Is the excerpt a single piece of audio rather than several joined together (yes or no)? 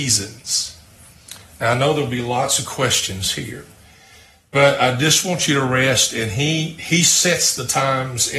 yes